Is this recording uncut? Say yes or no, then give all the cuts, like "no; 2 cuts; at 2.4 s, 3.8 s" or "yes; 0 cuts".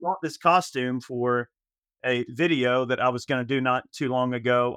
yes; 0 cuts